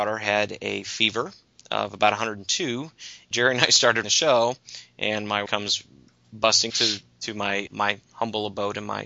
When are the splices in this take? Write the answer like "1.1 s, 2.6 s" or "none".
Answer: 3.3 s, 4.0 s, 5.5 s, 6.7 s, 7.7 s